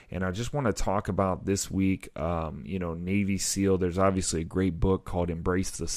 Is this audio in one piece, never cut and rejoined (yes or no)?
yes